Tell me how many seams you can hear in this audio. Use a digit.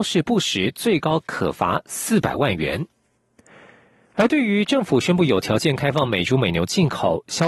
0